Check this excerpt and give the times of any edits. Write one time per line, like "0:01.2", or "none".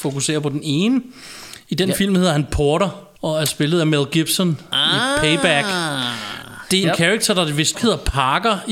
0:03.2
0:06.8
0:07.7